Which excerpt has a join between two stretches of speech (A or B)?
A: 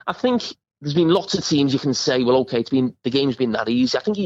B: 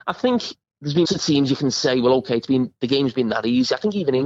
B